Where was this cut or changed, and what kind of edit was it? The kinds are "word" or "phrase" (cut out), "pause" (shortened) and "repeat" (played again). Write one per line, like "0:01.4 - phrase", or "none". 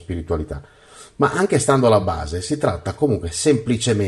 none